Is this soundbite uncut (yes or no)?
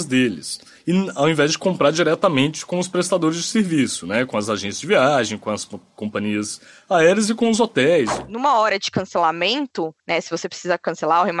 no